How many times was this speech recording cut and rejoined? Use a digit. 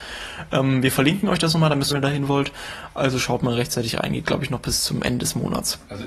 1